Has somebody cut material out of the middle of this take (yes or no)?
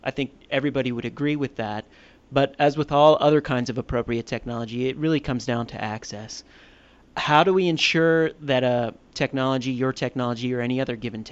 no